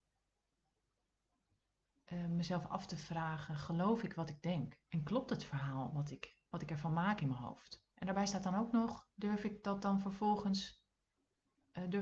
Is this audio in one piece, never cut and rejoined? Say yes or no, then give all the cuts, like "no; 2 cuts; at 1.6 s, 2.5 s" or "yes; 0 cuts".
no; 4 cuts; at 4.8 s, 6.5 s, 7.9 s, 9.1 s